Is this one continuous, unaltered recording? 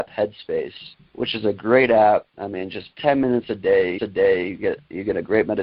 no; 3 cuts; at 1.0 s, 2.3 s, 4.0 s

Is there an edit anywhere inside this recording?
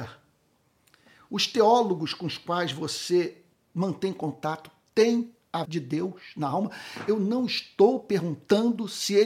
yes; 2 cuts; at 3.5 s, 5.6 s

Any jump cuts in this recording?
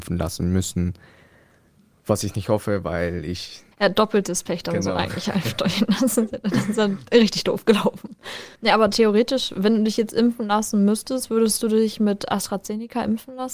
yes; 2 cuts; at 3.7 s, 8.6 s

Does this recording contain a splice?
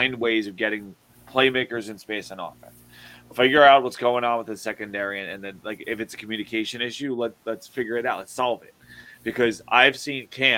no; 0 cuts

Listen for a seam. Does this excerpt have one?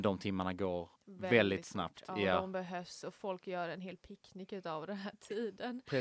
yes; 1 cut; at 1.0 s

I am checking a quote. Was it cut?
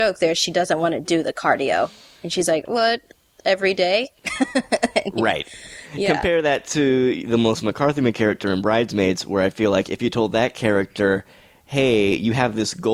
no; 0 cuts

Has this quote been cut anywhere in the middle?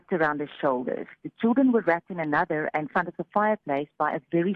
yes; 1 cut; at 2.9 s

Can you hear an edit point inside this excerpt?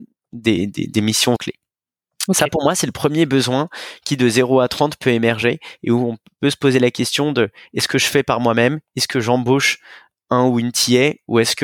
yes; 1 cut; at 1.4 s

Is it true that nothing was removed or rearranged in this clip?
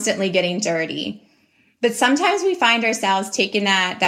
yes; 0 cuts

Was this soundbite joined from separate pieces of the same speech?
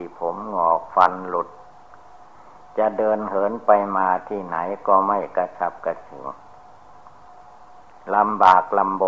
no; 0 cuts

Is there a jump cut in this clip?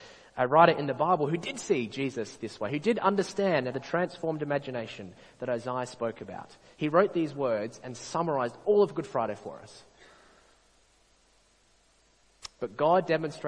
yes; 2 cuts; at 3.7 s, 6.7 s

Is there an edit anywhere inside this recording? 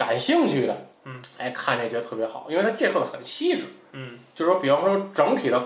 yes; 1 cut; at 0.9 s

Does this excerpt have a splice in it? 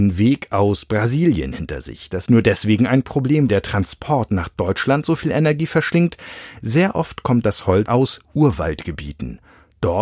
yes; 4 cuts; at 2.3 s, 3.5 s, 7.4 s, 7.9 s

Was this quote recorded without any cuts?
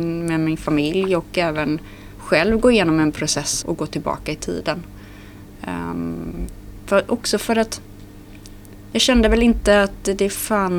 no; 1 cut; at 3.6 s

